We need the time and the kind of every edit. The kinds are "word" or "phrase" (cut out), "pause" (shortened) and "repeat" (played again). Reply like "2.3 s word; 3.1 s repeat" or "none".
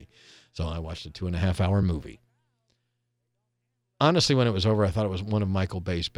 none